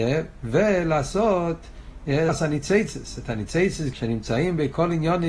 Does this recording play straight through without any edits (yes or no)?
no